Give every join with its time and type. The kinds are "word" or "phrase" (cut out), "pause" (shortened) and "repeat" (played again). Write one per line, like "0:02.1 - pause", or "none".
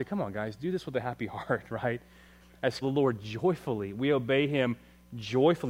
0:02.8 - phrase